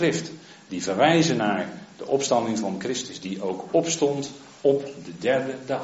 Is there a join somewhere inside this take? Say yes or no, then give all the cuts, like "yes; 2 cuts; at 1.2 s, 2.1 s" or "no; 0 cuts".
no; 0 cuts